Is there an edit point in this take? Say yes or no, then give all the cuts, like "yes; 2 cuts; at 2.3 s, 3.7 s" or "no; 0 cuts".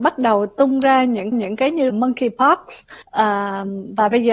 yes; 3 cuts; at 1.3 s, 1.9 s, 3.0 s